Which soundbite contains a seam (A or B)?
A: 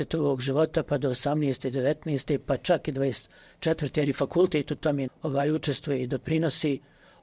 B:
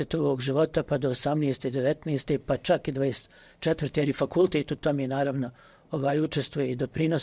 A